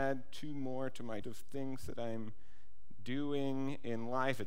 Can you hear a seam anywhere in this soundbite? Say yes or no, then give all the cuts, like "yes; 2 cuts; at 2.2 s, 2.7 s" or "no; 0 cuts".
yes; 1 cut; at 1.2 s